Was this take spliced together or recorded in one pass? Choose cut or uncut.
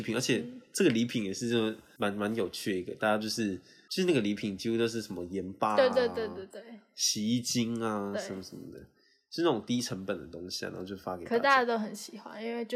uncut